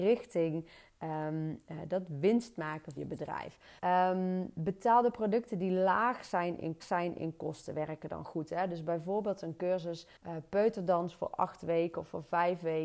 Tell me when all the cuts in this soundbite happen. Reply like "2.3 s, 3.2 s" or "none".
3.0 s, 3.8 s, 6.8 s, 10.2 s